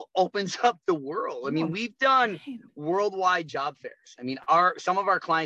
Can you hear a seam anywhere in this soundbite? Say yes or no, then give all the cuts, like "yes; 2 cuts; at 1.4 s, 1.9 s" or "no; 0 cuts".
no; 0 cuts